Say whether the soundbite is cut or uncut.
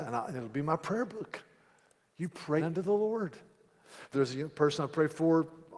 cut